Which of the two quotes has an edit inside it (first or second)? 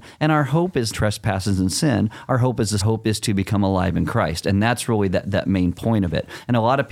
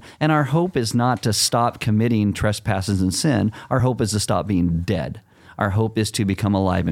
first